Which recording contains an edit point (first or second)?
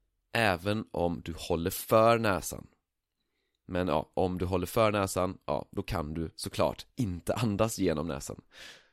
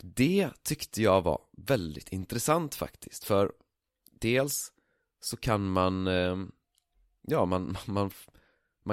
first